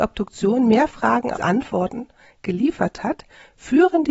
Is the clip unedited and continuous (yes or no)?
no